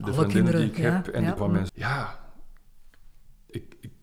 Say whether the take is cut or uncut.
cut